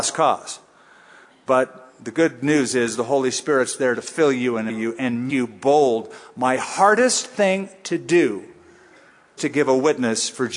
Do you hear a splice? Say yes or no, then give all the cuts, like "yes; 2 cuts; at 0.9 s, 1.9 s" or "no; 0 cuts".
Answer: yes; 3 cuts; at 4.7 s, 5.3 s, 9.4 s